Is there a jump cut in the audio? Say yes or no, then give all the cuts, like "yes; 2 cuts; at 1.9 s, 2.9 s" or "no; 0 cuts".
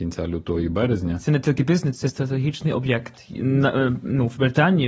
no; 0 cuts